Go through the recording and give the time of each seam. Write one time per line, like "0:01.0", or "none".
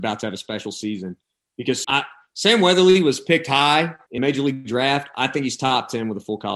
0:01.8
0:04.2